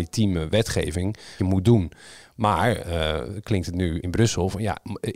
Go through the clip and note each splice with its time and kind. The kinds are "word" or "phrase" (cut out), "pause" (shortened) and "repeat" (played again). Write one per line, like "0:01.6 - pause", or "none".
0:01.4 - word
0:04.0 - word